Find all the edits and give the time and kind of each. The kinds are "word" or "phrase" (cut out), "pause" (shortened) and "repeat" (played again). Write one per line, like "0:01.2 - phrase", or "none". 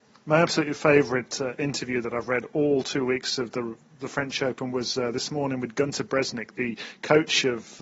none

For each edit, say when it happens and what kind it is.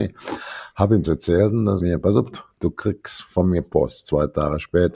0:01.0 - word
0:01.8 - phrase

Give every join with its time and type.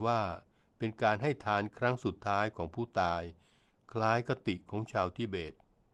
none

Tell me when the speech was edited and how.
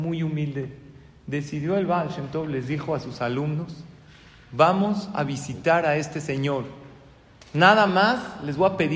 none

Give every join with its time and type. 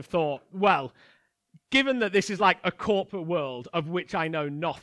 none

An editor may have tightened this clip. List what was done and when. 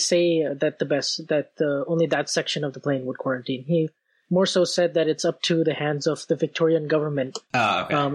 none

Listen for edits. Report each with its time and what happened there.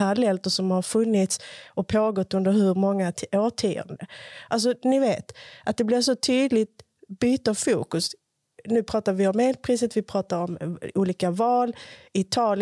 none

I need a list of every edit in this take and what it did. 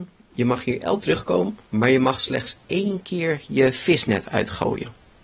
0:01.0 - word
0:01.6 - pause

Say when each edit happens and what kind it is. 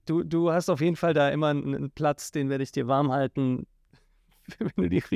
none

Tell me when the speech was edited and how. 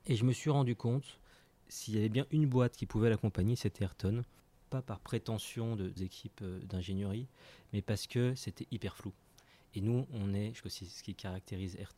0:01.6 - word
0:06.0 - word
0:10.6 - word

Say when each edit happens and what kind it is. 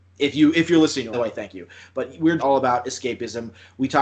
0:01.1 - phrase
0:02.4 - word

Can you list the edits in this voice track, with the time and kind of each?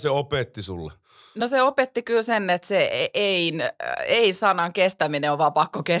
none

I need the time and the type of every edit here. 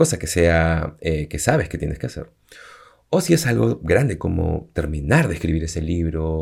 none

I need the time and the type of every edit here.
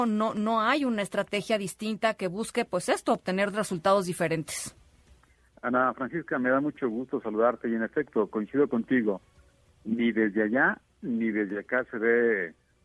none

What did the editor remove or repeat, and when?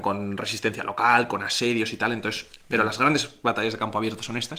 none

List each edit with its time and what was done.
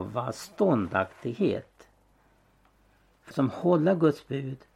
0:03.3 - word

